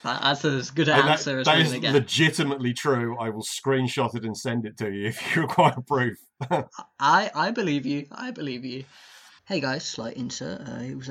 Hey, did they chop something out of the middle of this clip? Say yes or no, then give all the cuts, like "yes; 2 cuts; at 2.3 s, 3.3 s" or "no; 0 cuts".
yes; 1 cut; at 9.4 s